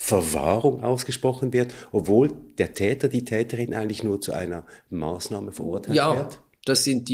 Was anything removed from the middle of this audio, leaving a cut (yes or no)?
no